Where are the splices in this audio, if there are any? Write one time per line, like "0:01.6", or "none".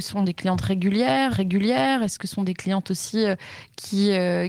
0:01.3